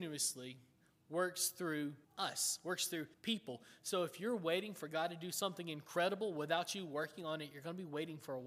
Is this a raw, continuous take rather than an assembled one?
no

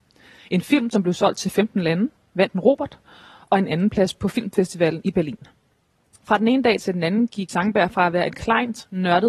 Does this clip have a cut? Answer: yes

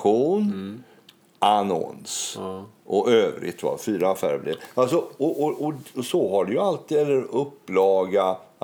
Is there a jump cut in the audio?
no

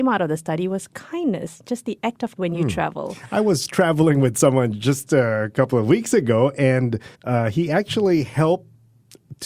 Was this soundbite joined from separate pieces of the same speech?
yes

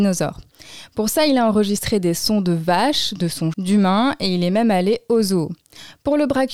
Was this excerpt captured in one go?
no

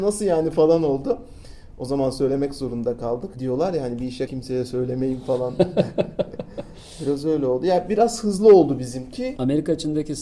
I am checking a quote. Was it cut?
yes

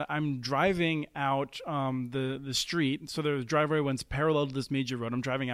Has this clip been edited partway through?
no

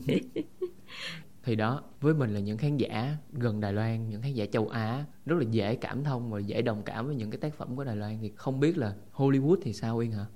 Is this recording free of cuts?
yes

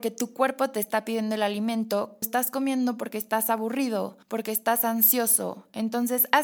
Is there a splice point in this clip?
yes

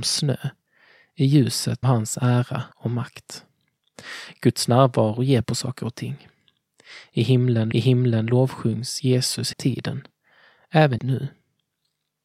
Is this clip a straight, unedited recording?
no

